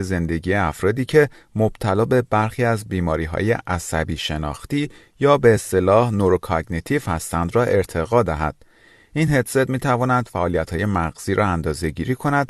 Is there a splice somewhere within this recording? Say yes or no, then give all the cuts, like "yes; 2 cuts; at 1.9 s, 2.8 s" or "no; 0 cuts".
no; 0 cuts